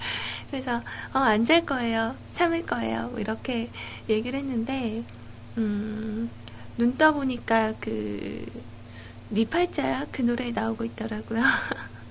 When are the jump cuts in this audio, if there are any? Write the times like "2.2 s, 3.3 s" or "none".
none